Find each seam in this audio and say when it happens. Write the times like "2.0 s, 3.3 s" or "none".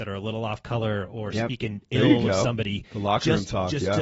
none